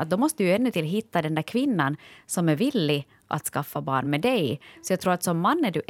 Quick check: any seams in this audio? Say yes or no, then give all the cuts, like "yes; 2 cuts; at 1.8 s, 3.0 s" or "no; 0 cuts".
no; 0 cuts